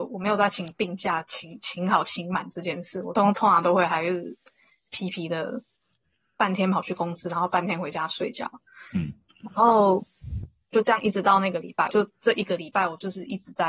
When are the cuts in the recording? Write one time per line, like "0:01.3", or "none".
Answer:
0:11.9